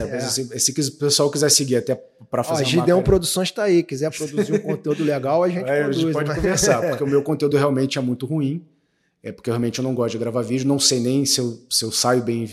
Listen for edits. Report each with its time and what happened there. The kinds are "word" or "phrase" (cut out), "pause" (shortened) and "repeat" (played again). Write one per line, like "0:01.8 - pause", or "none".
none